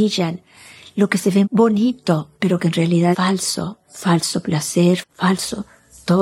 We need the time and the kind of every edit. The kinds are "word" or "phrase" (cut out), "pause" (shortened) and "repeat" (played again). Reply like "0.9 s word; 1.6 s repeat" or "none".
1.4 s word; 2.3 s pause; 3.1 s word; 3.8 s pause; 5.0 s phrase